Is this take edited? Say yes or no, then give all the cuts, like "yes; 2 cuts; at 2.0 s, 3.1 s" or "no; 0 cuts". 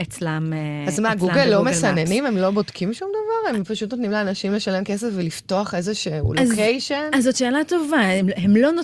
no; 0 cuts